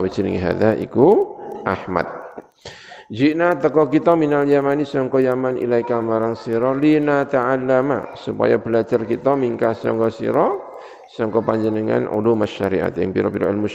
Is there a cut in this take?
no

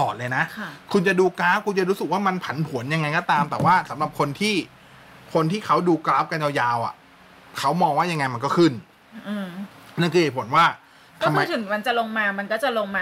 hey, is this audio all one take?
yes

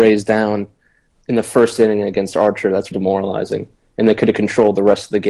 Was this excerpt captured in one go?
no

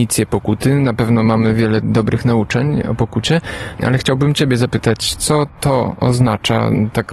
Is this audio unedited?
yes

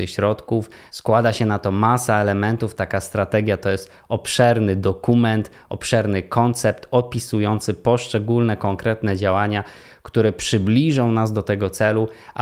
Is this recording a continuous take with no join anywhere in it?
yes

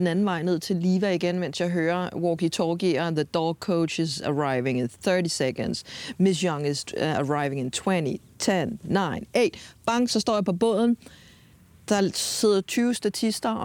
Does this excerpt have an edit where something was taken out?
no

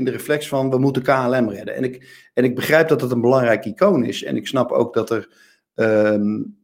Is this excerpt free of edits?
yes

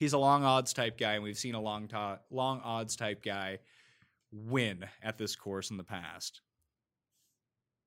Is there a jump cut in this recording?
no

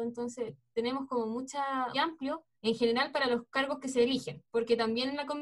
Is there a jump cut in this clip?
yes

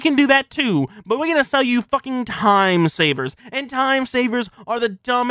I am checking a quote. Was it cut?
no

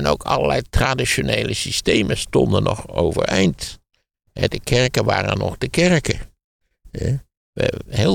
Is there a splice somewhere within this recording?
no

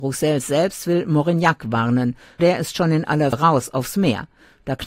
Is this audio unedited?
no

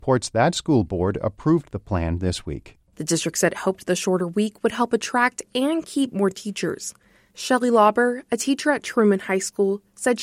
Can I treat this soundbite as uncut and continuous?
yes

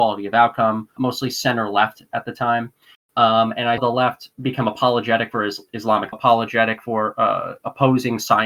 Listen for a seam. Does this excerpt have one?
yes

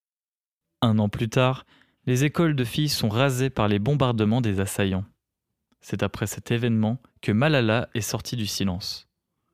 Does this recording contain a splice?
no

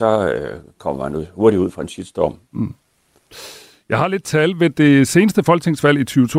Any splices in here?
no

